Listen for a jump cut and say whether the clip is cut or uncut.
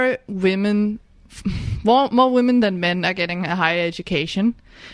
uncut